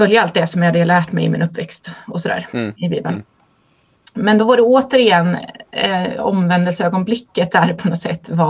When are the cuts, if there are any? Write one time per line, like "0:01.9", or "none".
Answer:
none